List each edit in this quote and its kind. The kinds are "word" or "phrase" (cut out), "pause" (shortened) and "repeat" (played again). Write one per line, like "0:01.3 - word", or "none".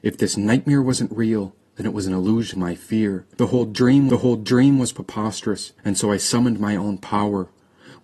0:02.5 - word
0:03.3 - pause
0:04.1 - repeat
0:05.8 - pause